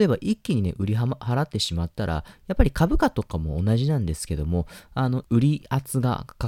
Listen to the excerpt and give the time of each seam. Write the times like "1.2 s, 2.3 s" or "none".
5.2 s